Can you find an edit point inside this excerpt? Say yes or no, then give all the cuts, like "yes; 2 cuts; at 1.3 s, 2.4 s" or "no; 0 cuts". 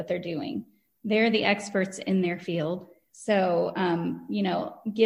no; 0 cuts